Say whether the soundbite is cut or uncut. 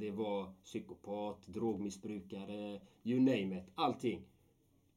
uncut